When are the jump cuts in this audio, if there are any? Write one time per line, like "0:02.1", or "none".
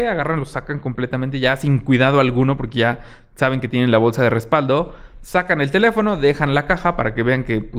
none